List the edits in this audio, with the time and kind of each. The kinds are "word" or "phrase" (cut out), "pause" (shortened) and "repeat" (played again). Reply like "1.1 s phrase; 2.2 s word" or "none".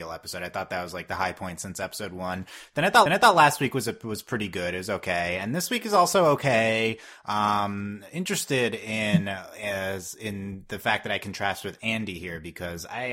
3.1 s repeat